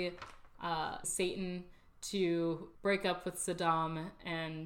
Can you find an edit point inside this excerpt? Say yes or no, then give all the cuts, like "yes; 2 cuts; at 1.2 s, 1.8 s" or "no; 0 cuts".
yes; 2 cuts; at 1.0 s, 2.7 s